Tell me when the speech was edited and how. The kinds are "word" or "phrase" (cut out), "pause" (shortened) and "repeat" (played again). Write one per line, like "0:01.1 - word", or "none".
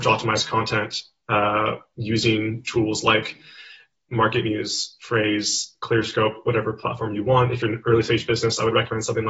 none

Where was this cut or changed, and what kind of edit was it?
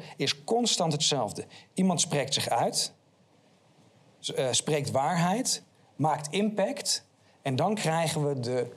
none

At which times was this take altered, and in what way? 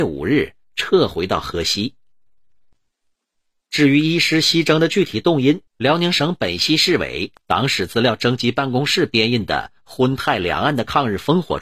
0:05.7 - pause

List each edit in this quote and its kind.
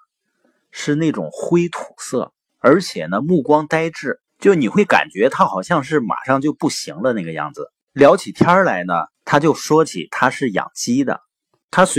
0:02.5 - pause
0:04.3 - pause
0:07.8 - pause
0:09.1 - pause

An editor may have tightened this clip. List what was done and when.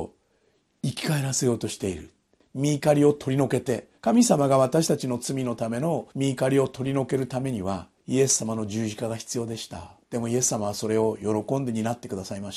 0:02.4 - pause
0:04.0 - pause
0:06.1 - pause
0:08.0 - pause
0:10.0 - pause

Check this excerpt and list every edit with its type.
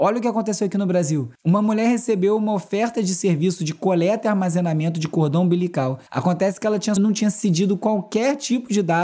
0:01.4 - pause
0:06.1 - pause
0:07.0 - phrase

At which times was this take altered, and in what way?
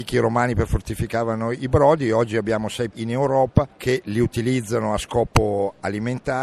0:02.9 - word

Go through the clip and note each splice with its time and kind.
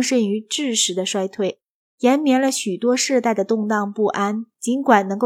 none

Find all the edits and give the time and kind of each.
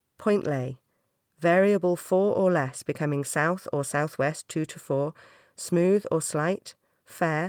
none

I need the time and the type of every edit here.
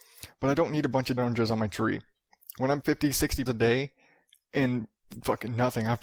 0:01.2 - word
0:02.8 - word
0:03.5 - word

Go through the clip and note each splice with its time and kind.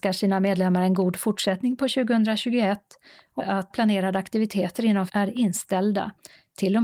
0:03.4 - word
0:03.7 - word
0:05.1 - word

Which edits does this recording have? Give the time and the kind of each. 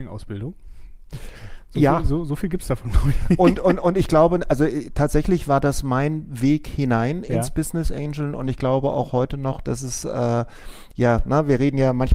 none

